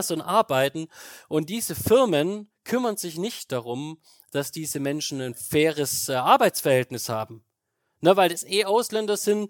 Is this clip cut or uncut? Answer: uncut